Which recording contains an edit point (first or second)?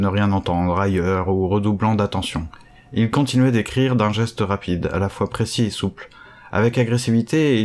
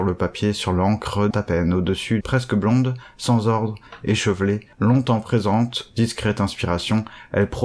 second